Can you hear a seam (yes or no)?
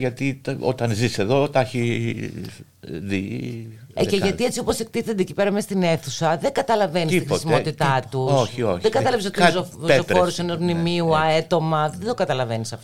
no